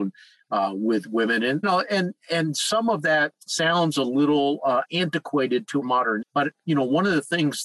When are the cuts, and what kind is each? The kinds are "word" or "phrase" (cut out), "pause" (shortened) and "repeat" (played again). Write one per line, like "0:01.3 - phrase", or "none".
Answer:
0:01.6 - word
0:03.4 - pause
0:04.8 - phrase
0:05.8 - word
0:06.2 - word